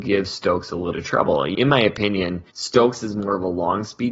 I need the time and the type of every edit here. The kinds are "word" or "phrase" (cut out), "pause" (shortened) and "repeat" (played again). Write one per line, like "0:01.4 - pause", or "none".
0:00.9 - word
0:01.5 - word
0:02.5 - pause